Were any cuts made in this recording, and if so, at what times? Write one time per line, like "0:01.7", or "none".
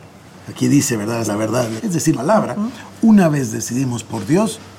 0:01.2
0:01.8
0:02.1